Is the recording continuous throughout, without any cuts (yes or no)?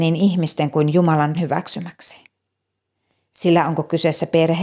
no